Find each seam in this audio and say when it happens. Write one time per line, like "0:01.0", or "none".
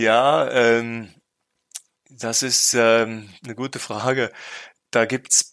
none